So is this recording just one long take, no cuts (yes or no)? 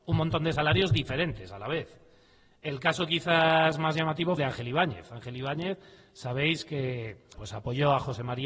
no